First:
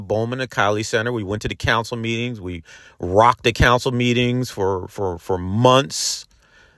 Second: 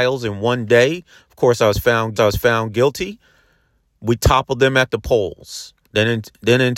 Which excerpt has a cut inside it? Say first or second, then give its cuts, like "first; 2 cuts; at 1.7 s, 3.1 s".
second; 1 cut; at 2.2 s